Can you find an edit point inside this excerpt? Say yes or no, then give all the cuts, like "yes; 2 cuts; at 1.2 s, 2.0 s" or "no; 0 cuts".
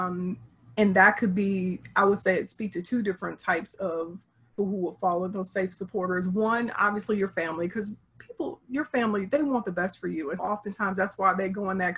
yes; 2 cuts; at 4.6 s, 10.4 s